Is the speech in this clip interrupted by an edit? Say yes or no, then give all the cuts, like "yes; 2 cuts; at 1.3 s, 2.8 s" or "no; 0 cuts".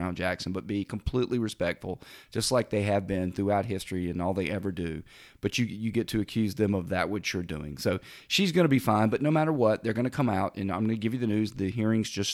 no; 0 cuts